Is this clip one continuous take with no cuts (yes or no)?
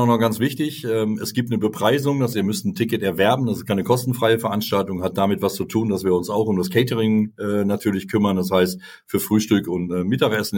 no